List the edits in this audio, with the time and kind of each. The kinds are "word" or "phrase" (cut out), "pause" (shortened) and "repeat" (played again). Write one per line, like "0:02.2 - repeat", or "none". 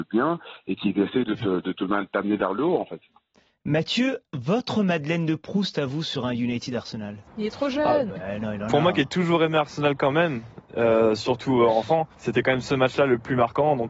0:04.3 - pause
0:07.3 - pause
0:08.1 - phrase
0:12.1 - pause